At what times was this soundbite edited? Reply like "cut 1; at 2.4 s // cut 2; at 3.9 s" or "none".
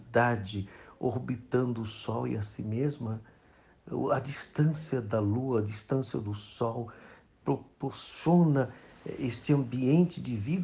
none